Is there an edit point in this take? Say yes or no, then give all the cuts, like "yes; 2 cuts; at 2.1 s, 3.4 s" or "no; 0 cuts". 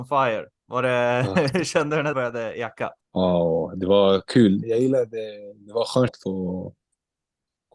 yes; 4 cuts; at 2.1 s, 3.0 s, 4.6 s, 6.1 s